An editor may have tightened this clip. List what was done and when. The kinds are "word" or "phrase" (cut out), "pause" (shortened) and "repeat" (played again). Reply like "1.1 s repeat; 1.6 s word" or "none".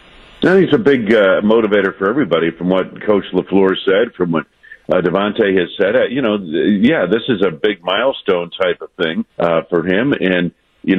9.3 s pause